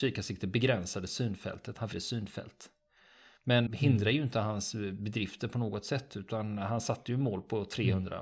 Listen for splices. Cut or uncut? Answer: cut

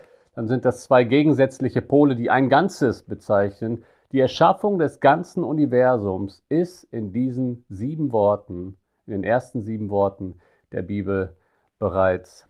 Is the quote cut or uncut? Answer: uncut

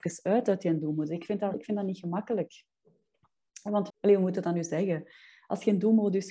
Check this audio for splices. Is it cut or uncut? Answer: cut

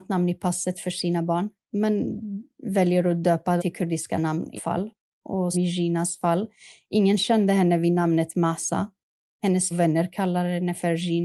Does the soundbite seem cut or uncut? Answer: cut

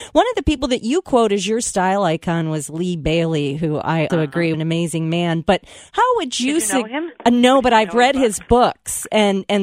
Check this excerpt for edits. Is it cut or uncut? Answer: cut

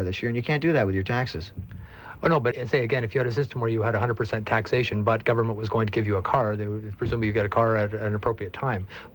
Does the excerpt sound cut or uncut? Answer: cut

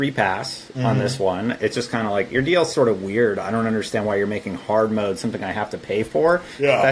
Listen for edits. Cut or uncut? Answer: cut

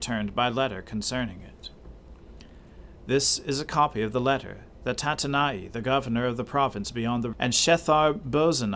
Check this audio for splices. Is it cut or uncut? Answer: cut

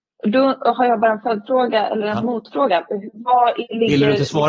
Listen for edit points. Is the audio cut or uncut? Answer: uncut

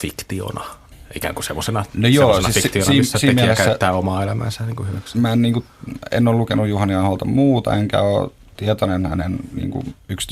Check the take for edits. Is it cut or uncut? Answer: uncut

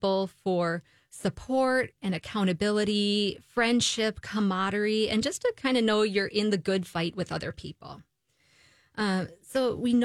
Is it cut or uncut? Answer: uncut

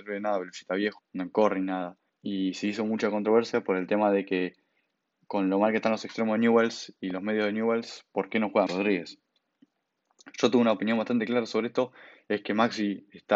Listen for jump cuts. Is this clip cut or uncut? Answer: cut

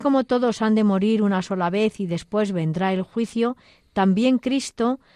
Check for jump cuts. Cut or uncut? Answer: uncut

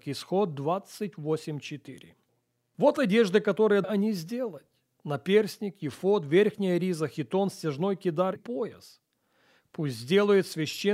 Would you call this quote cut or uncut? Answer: cut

